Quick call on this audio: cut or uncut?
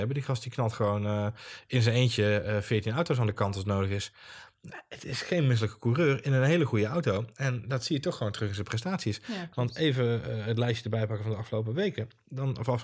uncut